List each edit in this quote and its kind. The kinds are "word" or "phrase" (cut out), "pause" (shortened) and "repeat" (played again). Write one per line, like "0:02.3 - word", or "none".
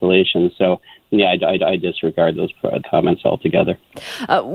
0:01.6 - repeat
0:02.8 - word